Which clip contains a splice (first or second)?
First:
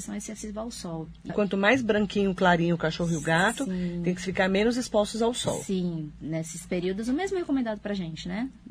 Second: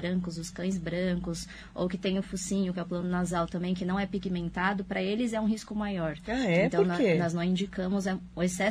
first